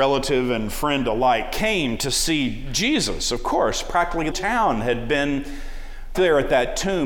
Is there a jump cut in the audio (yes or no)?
yes